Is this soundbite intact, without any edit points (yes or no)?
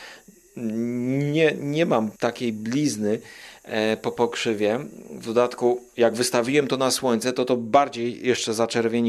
no